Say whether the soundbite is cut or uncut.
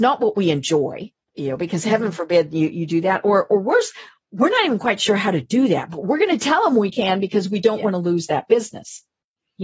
uncut